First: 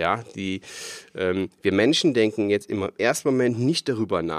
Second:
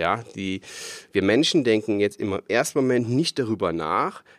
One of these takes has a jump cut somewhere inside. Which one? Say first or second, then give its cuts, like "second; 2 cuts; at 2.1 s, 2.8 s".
second; 1 cut; at 1.0 s